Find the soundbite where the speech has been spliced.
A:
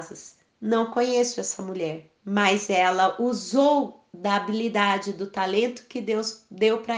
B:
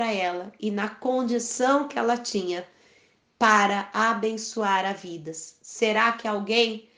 A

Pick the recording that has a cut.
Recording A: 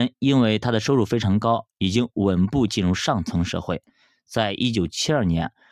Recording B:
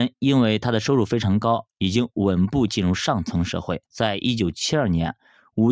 B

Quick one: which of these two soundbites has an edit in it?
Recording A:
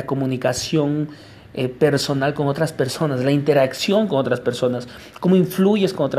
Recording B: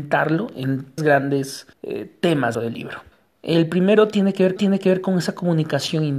B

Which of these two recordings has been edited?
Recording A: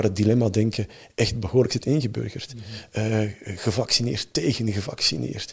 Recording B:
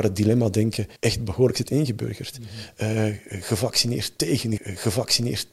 B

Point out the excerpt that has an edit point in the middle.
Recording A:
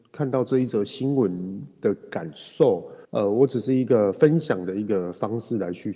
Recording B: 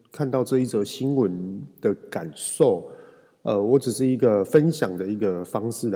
A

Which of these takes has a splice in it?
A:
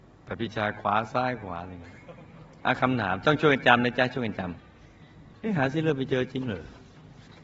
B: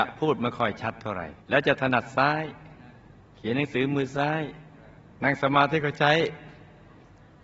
B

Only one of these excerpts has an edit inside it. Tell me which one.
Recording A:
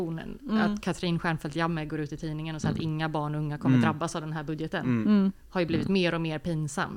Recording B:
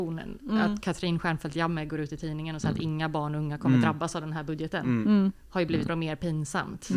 B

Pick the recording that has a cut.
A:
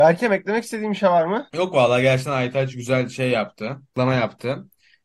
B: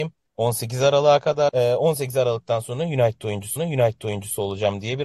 B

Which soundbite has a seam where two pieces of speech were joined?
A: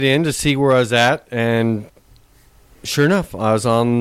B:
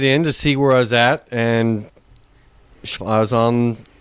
B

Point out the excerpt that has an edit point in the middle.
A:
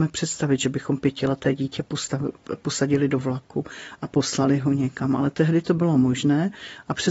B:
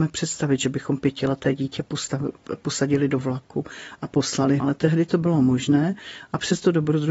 B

